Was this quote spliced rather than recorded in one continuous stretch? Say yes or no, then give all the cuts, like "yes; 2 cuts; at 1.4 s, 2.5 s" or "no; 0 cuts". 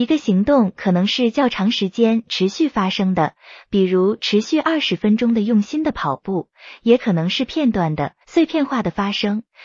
yes; 1 cut; at 8.2 s